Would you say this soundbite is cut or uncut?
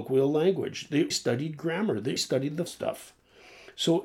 cut